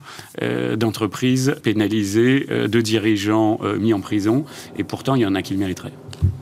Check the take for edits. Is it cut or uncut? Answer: cut